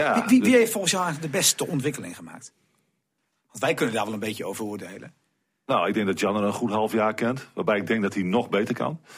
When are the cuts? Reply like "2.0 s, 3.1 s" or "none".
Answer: none